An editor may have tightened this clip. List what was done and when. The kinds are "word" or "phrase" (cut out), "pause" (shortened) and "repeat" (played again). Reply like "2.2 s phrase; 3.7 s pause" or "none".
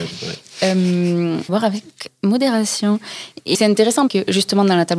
1.5 s word; 3.5 s word; 4.1 s word